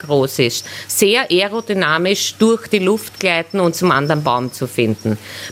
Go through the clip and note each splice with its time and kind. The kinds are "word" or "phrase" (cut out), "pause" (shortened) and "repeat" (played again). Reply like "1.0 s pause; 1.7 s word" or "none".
none